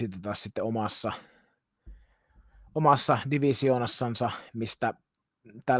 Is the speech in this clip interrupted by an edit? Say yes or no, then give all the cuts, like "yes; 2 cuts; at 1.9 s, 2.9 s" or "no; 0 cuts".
no; 0 cuts